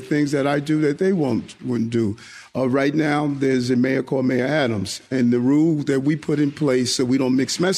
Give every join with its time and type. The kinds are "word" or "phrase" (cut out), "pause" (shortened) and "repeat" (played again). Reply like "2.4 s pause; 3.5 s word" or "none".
none